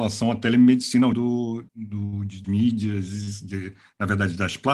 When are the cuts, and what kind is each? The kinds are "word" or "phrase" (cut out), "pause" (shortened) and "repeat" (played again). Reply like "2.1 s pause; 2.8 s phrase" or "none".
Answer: 1.1 s word; 1.7 s pause; 2.4 s word

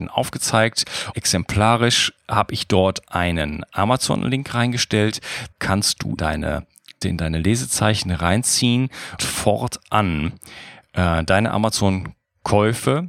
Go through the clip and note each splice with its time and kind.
1.1 s word; 2.2 s word; 5.5 s word; 6.2 s word; 7.0 s word; 9.2 s word

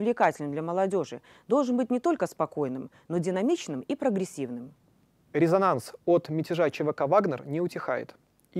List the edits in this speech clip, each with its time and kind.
none

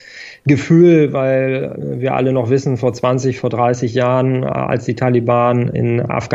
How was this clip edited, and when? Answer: none

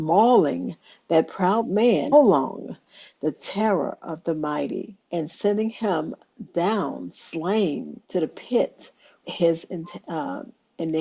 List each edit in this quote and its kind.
2.1 s phrase; 5.0 s pause; 8.0 s pause; 9.2 s word

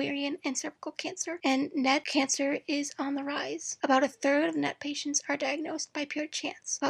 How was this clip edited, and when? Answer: none

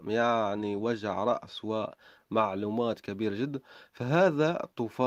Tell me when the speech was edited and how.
none

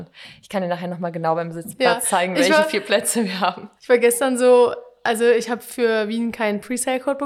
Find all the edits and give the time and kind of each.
3.8 s pause

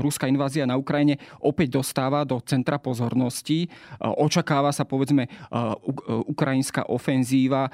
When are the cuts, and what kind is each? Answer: none

